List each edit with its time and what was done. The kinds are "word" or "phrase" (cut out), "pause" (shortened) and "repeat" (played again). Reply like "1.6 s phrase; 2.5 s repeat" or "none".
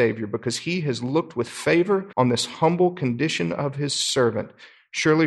2.1 s pause